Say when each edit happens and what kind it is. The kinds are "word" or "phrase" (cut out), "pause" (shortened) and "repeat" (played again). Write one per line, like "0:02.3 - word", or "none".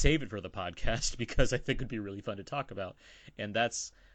none